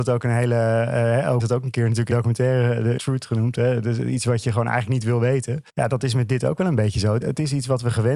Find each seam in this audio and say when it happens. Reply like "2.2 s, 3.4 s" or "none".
1.4 s, 2.1 s, 3.0 s, 5.7 s, 7.2 s